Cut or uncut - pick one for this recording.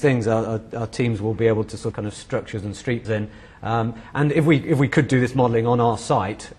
cut